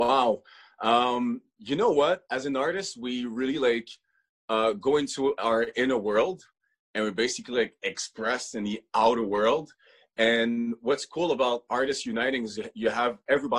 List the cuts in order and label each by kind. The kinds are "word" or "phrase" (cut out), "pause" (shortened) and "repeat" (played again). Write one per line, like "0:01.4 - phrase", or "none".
none